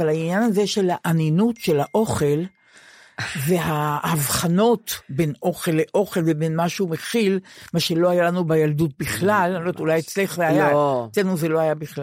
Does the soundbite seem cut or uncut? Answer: uncut